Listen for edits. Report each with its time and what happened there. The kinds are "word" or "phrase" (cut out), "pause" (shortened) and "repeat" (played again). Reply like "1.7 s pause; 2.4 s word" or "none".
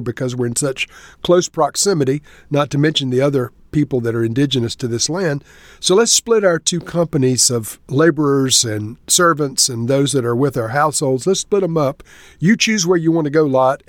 none